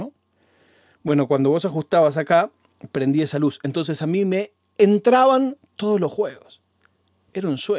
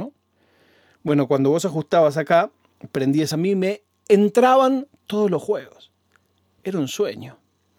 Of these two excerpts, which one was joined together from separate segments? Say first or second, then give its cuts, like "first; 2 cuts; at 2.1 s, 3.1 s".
second; 1 cut; at 3.3 s